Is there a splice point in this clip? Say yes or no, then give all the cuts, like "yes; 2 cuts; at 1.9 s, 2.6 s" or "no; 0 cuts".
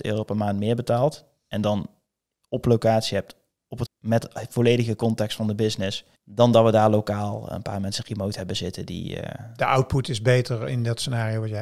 yes; 2 cuts; at 3.8 s, 6.1 s